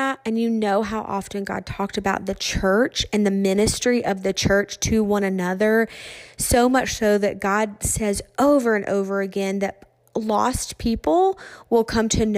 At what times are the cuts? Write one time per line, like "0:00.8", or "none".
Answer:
none